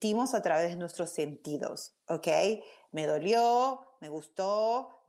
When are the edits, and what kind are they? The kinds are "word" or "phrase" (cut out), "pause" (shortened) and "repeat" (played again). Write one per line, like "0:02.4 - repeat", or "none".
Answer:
0:02.0 - pause